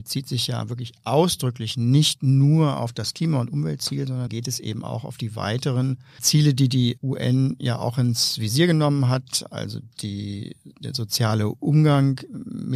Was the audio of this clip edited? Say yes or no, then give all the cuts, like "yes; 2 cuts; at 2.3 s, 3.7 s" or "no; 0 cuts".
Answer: yes; 3 cuts; at 4.3 s, 6.2 s, 7.0 s